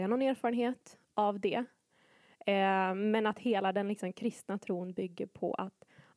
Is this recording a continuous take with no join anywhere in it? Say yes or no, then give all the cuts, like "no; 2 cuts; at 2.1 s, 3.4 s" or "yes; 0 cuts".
yes; 0 cuts